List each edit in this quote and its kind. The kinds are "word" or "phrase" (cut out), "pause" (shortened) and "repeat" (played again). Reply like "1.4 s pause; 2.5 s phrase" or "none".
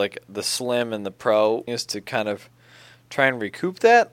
1.7 s word